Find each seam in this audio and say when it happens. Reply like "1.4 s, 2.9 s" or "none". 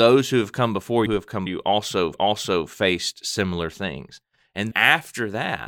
1.1 s, 1.5 s, 2.1 s, 4.7 s